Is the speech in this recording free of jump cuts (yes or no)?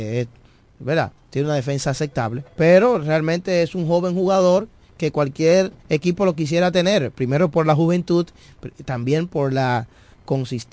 no